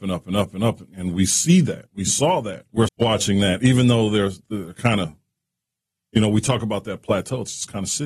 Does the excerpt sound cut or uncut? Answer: cut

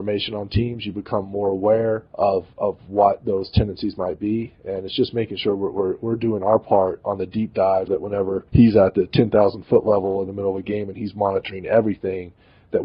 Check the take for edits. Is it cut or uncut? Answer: cut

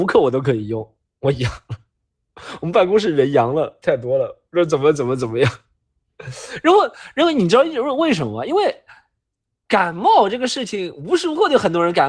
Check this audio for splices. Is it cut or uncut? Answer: uncut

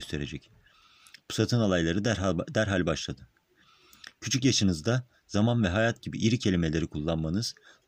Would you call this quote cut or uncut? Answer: uncut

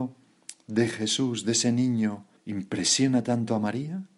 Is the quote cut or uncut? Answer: cut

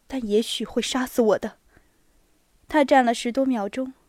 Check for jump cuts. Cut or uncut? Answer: uncut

